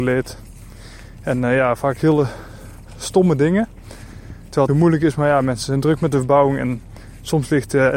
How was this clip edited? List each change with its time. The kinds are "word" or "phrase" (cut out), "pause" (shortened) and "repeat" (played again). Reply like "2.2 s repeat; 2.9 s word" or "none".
4.7 s phrase